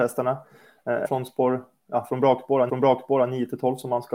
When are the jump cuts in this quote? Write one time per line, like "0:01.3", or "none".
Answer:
0:01.0
0:02.7